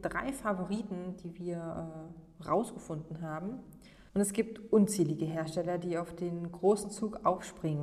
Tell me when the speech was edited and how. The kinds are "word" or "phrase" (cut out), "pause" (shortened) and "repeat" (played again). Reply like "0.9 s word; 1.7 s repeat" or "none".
4.1 s pause